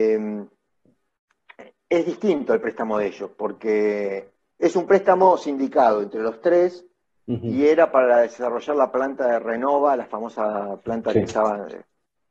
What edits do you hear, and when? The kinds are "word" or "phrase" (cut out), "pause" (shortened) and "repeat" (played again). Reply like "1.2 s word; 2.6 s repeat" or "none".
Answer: none